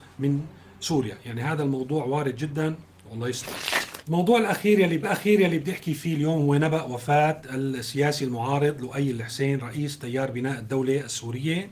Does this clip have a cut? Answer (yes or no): yes